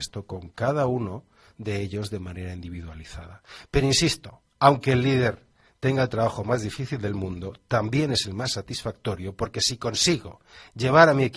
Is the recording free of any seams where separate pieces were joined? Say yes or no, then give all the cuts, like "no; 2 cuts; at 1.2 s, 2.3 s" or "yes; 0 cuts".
yes; 0 cuts